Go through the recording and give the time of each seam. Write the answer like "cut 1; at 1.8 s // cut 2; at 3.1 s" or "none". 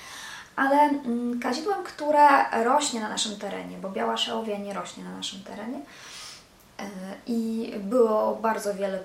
none